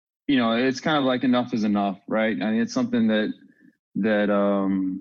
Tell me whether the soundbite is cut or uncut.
uncut